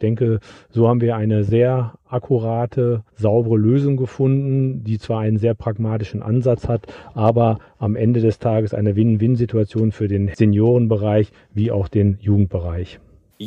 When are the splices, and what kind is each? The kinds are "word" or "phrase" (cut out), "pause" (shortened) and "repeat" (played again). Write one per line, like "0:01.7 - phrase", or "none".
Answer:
0:03.1 - pause